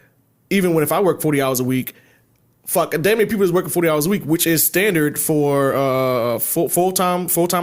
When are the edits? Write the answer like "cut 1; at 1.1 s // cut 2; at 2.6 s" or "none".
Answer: none